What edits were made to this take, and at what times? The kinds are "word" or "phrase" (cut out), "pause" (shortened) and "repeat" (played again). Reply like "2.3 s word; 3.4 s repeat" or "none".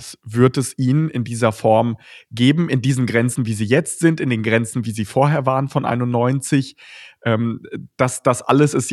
none